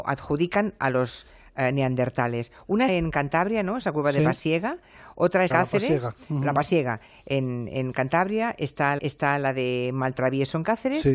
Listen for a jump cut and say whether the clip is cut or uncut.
cut